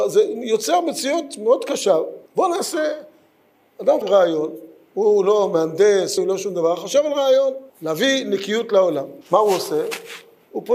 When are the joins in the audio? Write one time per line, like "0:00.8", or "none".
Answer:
0:02.3
0:04.0
0:06.2
0:07.7
0:09.2